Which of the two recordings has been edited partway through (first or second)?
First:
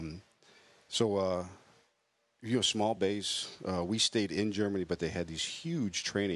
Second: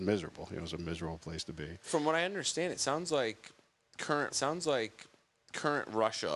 second